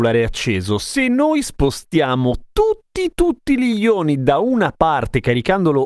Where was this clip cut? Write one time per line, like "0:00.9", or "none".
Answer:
none